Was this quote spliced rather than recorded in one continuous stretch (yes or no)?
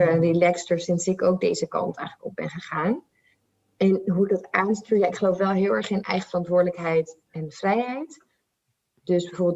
no